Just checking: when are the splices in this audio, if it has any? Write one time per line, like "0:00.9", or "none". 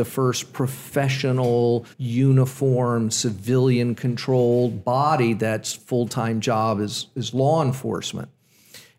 0:01.9